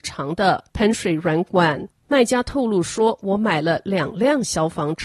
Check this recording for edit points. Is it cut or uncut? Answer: uncut